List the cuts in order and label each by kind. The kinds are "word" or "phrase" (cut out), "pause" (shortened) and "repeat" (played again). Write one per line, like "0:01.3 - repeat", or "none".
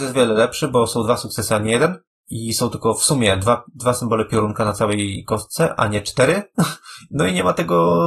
none